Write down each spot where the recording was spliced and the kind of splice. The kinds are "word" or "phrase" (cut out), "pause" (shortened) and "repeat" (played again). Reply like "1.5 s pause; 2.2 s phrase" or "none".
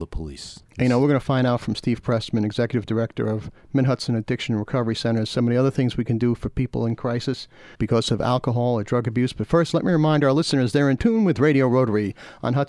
7.7 s pause